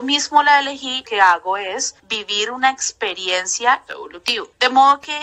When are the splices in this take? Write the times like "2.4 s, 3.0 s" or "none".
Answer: 1.1 s, 2.0 s, 3.9 s